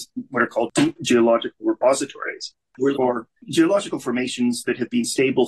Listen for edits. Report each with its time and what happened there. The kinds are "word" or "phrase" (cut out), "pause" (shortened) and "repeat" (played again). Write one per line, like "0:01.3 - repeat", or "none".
0:02.9 - word